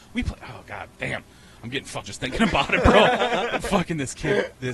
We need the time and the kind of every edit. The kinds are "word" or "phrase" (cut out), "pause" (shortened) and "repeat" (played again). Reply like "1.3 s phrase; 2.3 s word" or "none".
2.0 s word